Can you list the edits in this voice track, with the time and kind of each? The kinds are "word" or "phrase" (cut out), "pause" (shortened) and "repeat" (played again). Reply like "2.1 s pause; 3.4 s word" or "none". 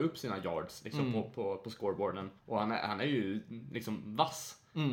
2.4 s pause